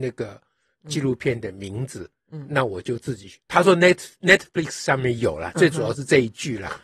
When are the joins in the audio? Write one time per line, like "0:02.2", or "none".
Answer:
none